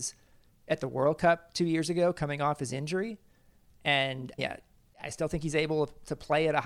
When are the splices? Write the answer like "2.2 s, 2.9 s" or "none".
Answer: 4.4 s